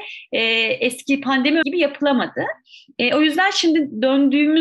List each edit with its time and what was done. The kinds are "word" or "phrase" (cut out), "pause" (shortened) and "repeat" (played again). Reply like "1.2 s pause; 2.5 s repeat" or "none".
1.6 s word